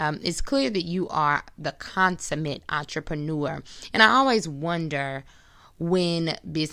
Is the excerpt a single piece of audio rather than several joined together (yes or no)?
yes